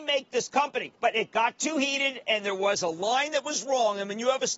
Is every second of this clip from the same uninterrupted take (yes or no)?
no